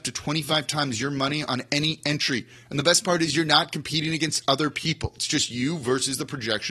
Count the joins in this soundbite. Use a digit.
0